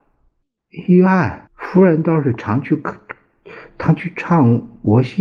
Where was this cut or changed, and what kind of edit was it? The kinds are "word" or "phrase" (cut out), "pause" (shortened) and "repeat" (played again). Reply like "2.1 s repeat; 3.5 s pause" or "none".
1.5 s pause